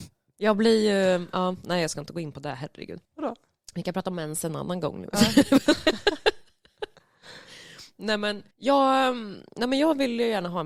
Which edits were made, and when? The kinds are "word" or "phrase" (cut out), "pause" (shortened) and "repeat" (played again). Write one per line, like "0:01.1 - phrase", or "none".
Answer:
0:03.0 - pause
0:08.5 - pause